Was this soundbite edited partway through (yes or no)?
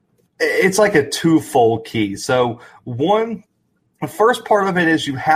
no